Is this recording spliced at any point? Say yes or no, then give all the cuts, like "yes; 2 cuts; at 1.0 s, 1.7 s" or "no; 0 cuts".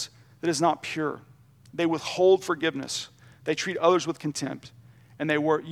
no; 0 cuts